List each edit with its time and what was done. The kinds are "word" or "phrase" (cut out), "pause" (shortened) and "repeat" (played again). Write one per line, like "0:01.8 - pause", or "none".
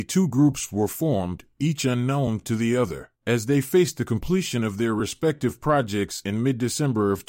0:03.2 - pause